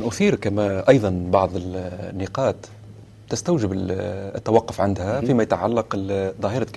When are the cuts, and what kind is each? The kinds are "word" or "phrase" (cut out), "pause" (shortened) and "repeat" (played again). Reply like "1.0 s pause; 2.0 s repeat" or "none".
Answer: none